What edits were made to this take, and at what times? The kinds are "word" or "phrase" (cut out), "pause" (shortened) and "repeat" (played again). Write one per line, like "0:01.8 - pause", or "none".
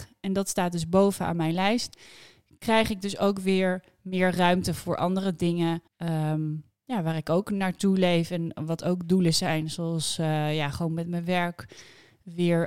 0:05.9 - pause

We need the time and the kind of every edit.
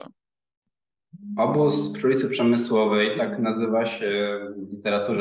none

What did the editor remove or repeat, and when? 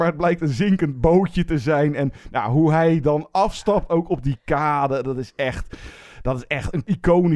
none

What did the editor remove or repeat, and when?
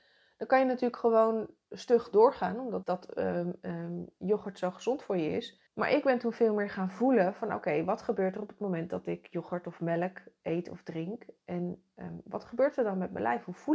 0:02.8 - phrase
0:05.7 - pause

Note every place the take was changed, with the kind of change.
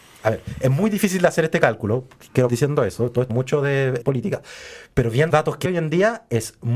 0:02.5 - word
0:03.3 - word
0:04.0 - word
0:05.3 - word
0:05.6 - word

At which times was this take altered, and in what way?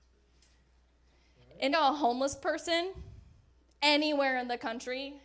0:01.7 - word

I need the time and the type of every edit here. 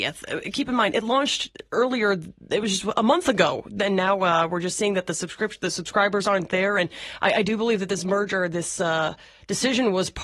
none

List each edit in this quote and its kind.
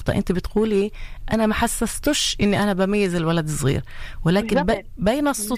none

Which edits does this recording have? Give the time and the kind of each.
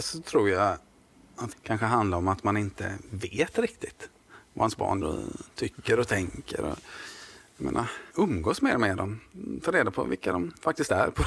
0:01.5 - word
0:05.0 - word
0:08.1 - pause

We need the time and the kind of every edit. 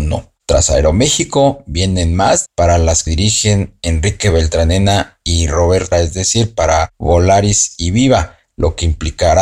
0:02.5 - word
0:03.1 - word
0:05.9 - word

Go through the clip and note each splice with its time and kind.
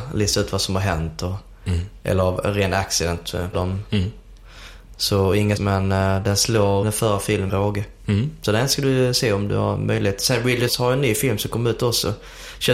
0:03.5 - word
0:05.6 - word
0:06.8 - word
0:07.5 - word
0:10.7 - word

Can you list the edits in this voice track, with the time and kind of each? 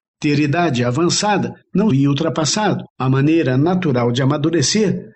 0:01.9 - phrase
0:02.9 - pause

